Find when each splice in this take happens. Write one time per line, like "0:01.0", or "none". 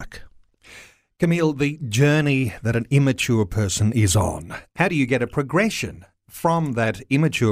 none